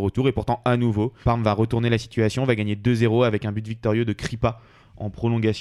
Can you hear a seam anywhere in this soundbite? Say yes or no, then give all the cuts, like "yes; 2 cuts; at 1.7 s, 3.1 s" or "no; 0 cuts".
yes; 1 cut; at 1.2 s